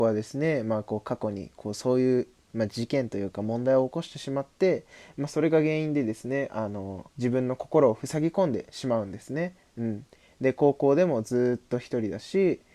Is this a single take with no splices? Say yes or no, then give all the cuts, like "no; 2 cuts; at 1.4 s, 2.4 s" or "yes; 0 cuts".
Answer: no; 1 cut; at 7.1 s